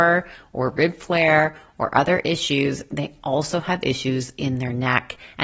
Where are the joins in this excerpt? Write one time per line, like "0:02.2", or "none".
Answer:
none